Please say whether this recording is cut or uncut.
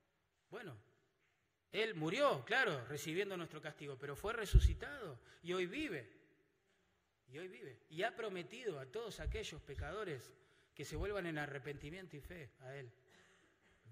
uncut